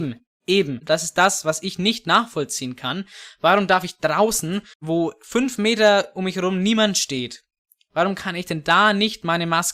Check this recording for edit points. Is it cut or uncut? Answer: uncut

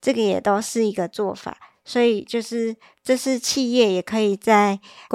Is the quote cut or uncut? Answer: uncut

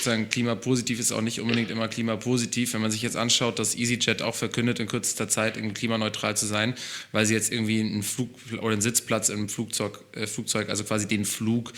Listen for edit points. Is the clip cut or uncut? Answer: uncut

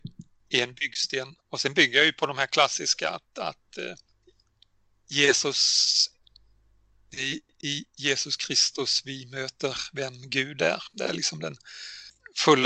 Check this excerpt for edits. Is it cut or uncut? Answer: uncut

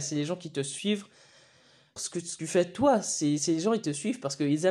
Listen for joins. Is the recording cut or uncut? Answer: cut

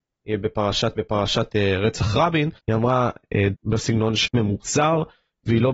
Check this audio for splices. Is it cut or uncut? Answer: cut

